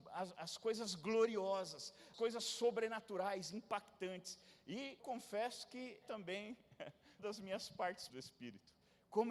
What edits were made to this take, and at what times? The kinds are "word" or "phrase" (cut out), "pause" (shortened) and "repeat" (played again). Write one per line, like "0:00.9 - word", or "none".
0:02.1 - word
0:05.0 - word
0:06.0 - word
0:07.2 - word
0:08.1 - word